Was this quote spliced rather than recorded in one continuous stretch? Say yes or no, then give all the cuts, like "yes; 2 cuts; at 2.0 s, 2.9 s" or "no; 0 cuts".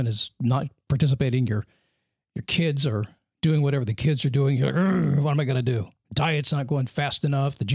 no; 0 cuts